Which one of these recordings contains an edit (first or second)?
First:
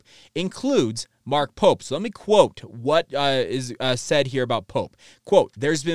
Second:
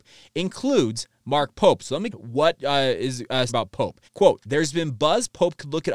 second